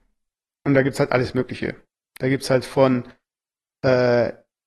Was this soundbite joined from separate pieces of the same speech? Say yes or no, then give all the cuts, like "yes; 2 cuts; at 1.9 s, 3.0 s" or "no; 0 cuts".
no; 0 cuts